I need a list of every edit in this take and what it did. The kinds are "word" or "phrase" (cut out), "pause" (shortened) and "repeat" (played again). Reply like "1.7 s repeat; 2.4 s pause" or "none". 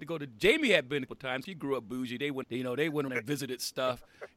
1.1 s word; 1.4 s word; 2.4 s word; 3.1 s word

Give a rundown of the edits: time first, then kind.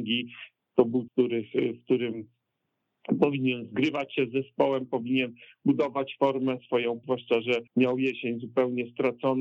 1.1 s word; 7.0 s word; 7.7 s pause

